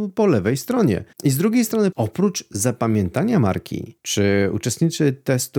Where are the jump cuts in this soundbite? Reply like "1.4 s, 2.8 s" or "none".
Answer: 1.1 s, 1.9 s, 4.0 s